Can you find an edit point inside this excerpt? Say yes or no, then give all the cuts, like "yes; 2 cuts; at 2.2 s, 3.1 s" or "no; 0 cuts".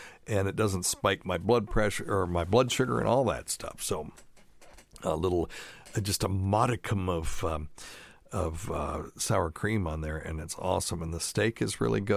no; 0 cuts